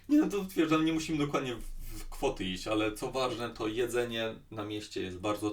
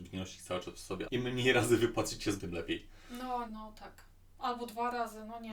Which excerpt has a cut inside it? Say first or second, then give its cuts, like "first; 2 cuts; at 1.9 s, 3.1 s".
second; 3 cuts; at 1.0 s, 2.4 s, 3.5 s